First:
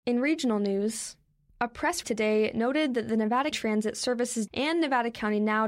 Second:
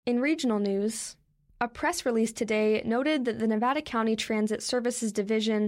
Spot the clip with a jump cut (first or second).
first